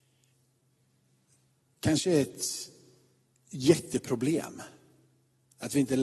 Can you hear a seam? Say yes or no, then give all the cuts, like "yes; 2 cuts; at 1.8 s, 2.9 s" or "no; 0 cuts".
no; 0 cuts